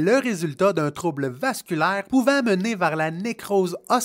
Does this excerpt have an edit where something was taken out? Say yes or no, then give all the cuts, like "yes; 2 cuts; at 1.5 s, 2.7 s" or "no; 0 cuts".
no; 0 cuts